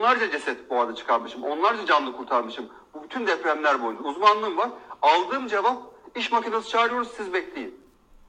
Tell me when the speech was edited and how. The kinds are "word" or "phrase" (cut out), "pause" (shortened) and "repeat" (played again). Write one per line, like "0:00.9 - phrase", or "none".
none